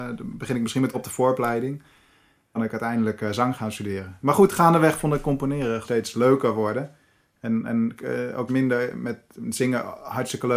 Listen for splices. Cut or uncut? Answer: cut